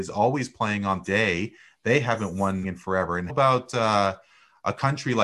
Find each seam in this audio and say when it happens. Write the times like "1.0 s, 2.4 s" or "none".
1.0 s, 2.6 s, 3.3 s